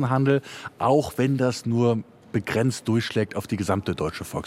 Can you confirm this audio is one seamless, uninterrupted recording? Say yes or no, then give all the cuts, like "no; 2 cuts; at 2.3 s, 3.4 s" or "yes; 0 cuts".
yes; 0 cuts